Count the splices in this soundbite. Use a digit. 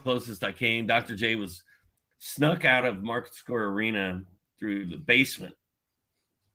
0